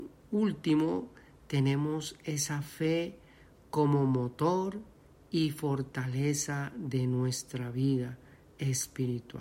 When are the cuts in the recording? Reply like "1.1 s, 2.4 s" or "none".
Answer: none